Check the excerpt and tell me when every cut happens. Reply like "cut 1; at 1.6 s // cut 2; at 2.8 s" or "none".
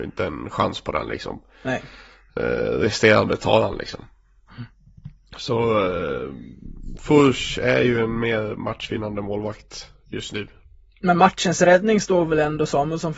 none